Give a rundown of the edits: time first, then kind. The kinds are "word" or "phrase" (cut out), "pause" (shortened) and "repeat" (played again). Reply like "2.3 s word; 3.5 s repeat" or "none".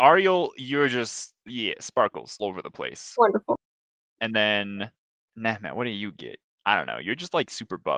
2.4 s word